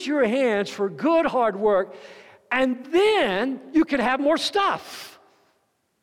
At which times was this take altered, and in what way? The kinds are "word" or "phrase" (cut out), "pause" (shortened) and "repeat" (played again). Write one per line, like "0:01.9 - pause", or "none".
none